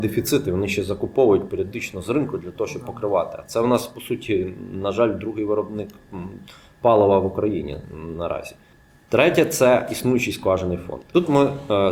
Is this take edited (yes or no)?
no